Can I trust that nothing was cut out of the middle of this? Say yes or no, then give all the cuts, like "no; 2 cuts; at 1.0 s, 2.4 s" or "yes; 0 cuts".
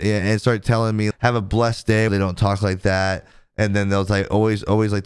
no; 2 cuts; at 1.1 s, 2.1 s